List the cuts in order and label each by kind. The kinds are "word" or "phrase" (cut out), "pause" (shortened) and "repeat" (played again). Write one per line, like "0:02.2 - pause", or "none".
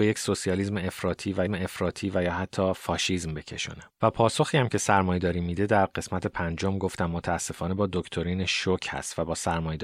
0:01.5 - repeat
0:03.9 - pause